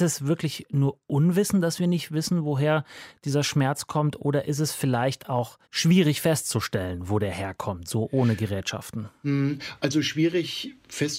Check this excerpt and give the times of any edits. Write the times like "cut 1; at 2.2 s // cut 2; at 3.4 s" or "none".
cut 1; at 5.6 s